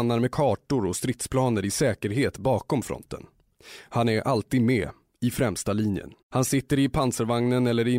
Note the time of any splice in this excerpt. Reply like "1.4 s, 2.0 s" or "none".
6.2 s